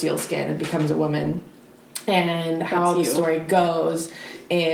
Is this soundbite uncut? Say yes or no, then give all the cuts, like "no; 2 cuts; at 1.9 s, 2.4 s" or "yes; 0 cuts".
yes; 0 cuts